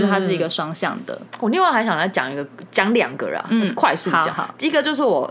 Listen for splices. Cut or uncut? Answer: cut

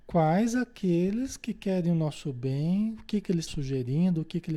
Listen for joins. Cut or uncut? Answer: cut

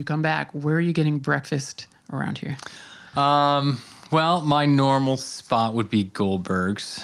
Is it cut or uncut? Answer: uncut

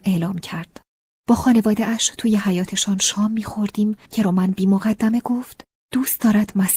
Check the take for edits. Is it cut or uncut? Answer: cut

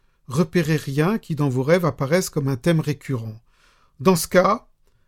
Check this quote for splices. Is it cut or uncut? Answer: uncut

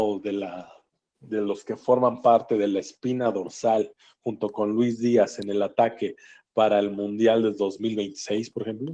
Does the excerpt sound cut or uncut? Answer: uncut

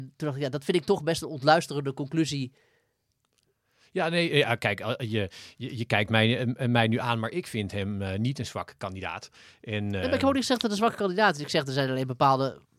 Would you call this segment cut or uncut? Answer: uncut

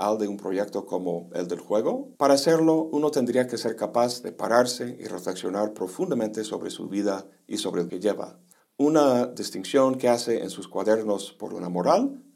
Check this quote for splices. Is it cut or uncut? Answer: cut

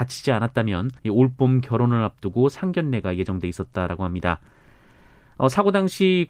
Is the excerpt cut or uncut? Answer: cut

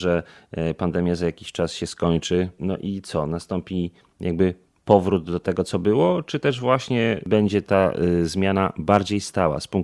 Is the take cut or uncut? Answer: uncut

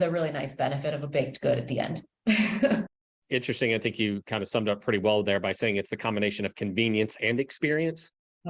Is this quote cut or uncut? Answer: uncut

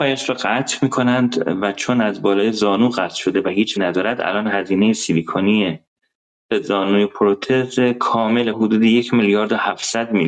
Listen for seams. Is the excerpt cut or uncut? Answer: cut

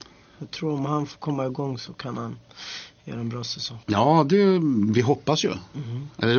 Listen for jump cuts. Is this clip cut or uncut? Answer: cut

